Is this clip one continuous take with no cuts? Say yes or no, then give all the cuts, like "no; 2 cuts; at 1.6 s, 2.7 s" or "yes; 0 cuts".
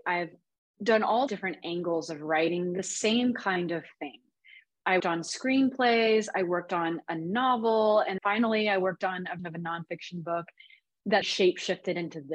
no; 5 cuts; at 1.3 s, 5.0 s, 8.2 s, 9.4 s, 11.2 s